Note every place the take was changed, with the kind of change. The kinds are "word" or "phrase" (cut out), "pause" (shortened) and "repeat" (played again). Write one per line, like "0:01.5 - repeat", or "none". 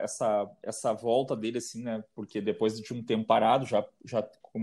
none